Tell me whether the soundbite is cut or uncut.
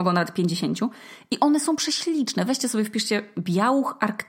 uncut